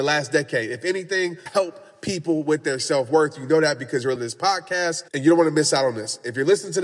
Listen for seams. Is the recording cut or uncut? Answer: cut